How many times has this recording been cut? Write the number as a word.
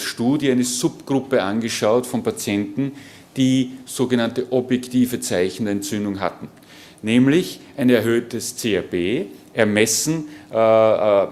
zero